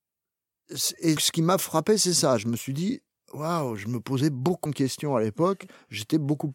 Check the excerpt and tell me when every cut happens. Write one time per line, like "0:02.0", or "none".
0:01.2
0:04.7